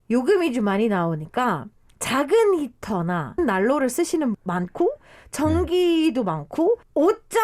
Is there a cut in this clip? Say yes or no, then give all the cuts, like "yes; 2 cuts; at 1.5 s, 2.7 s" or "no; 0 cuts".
yes; 2 cuts; at 3.4 s, 4.3 s